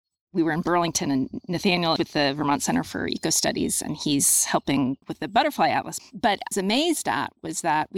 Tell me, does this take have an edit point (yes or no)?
yes